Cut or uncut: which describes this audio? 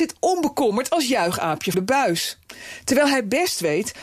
cut